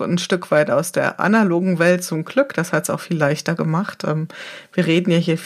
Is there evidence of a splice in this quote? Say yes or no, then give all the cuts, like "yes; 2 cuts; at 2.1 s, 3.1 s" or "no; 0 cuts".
no; 0 cuts